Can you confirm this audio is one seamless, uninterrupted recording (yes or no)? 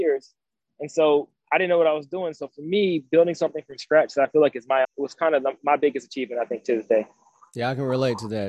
no